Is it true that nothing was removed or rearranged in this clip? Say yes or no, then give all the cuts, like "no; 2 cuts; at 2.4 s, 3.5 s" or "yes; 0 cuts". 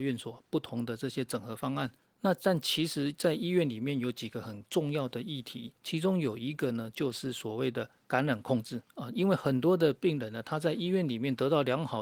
no; 3 cuts; at 2.0 s, 5.8 s, 8.9 s